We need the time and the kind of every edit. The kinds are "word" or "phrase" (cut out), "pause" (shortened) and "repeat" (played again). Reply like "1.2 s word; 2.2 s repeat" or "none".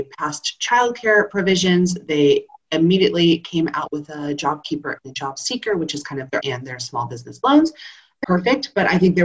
6.4 s word; 8.2 s word